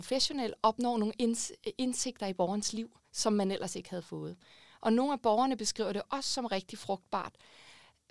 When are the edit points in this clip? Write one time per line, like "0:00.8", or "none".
none